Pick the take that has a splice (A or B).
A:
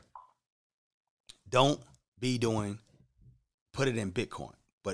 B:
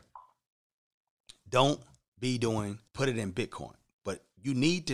B